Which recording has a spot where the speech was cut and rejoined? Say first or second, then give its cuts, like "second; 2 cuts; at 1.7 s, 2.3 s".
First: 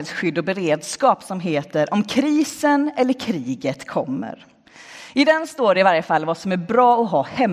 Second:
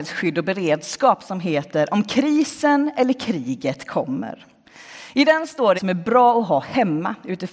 second; 1 cut; at 5.8 s